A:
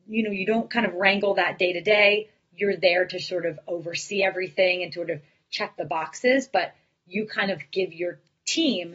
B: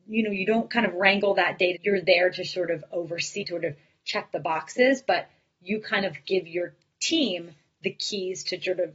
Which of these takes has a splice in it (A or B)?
B